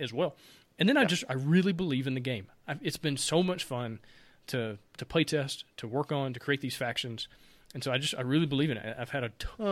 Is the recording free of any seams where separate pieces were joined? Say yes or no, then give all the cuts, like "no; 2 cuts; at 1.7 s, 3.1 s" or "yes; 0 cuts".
yes; 0 cuts